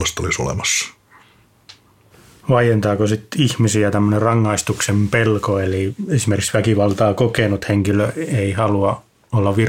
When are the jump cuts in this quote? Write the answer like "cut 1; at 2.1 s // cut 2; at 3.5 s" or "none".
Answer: none